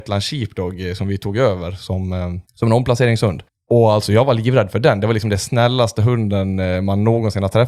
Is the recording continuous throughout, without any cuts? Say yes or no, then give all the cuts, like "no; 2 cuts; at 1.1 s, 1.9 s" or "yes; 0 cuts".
no; 2 cuts; at 2.4 s, 3.5 s